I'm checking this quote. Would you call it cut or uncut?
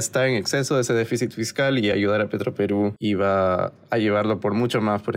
uncut